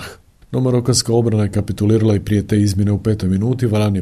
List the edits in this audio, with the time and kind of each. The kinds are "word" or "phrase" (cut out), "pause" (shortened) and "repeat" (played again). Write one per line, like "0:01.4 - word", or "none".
none